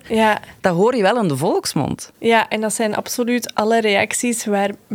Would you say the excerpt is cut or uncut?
uncut